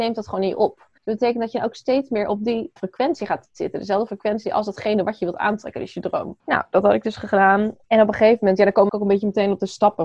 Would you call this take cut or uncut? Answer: cut